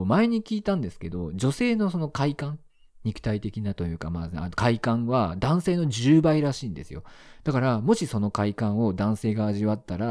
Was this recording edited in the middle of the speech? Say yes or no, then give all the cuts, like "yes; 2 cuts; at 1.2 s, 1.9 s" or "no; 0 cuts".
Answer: no; 0 cuts